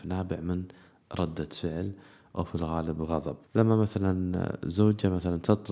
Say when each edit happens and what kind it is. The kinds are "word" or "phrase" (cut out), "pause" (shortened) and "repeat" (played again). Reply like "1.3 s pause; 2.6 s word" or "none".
3.5 s pause